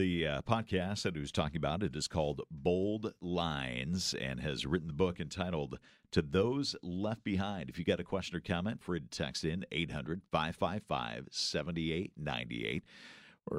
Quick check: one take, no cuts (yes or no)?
no